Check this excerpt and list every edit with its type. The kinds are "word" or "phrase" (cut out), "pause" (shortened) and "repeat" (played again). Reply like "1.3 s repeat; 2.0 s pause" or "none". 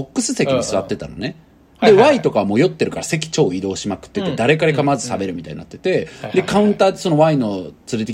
none